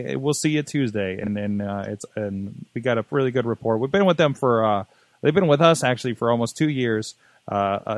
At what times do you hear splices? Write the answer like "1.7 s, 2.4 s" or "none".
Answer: none

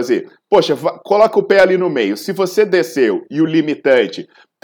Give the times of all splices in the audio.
none

